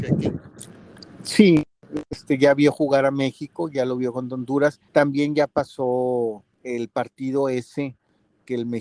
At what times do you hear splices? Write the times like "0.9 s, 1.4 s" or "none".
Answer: 4.9 s, 6.5 s